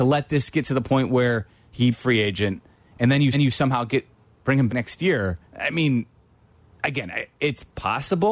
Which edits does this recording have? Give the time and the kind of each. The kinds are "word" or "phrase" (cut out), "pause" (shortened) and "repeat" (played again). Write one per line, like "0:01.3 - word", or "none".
0:01.9 - word
0:03.3 - repeat
0:04.7 - word
0:05.4 - pause